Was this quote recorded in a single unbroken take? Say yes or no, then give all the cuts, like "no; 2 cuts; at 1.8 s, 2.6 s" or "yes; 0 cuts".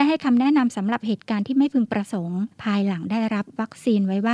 no; 1 cut; at 2.5 s